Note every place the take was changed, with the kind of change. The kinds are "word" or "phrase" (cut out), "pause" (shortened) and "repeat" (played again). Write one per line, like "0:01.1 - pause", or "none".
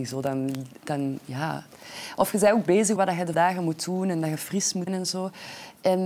0:03.0 - word
0:03.3 - word
0:04.9 - word